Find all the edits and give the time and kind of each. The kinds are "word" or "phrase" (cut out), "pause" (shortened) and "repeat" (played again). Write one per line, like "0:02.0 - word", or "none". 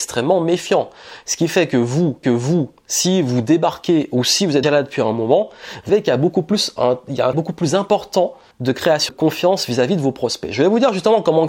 0:02.2 - repeat
0:04.6 - word
0:05.9 - word
0:07.3 - word
0:08.5 - pause
0:09.1 - word

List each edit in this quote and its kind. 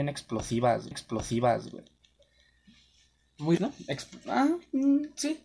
0:00.9 - repeat
0:03.6 - word

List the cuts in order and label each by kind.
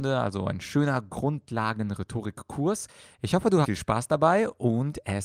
0:03.6 - word

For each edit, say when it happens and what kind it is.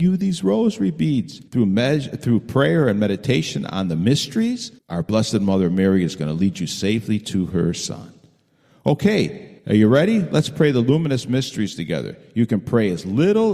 0:01.5 - pause
0:04.8 - pause
0:09.6 - pause

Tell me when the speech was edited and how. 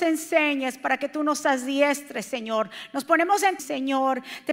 0:03.6 - phrase

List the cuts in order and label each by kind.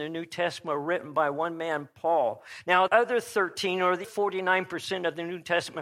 0:02.9 - word
0:04.0 - word

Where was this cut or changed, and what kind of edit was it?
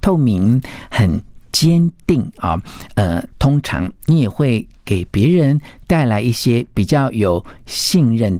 none

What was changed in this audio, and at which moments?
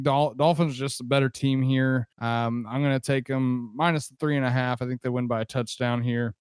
0:02.1 - pause

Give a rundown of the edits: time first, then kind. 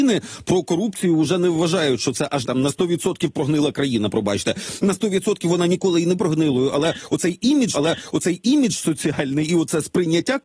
0:02.4 - word
0:06.1 - word
0:07.7 - repeat

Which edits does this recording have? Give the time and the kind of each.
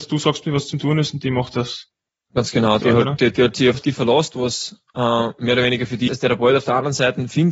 0:02.8 - word
0:03.2 - word
0:03.7 - word
0:06.1 - word

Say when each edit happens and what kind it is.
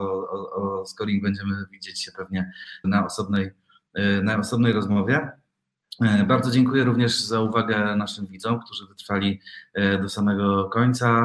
0:02.8 - word

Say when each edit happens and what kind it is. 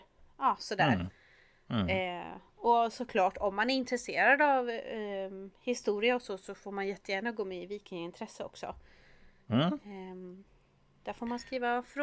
none

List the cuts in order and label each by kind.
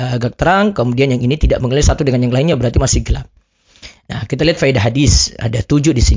none

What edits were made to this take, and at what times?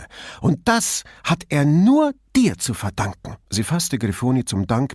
0:03.4 - pause

